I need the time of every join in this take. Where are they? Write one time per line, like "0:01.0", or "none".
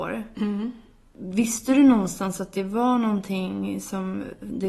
none